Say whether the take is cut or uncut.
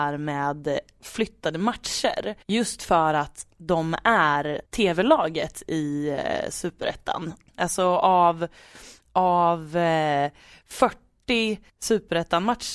cut